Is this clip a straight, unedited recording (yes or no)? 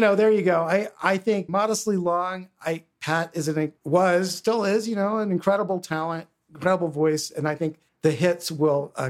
no